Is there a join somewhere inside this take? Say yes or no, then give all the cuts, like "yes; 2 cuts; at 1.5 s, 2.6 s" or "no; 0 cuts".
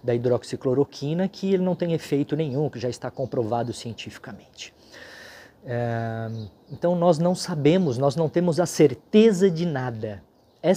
no; 0 cuts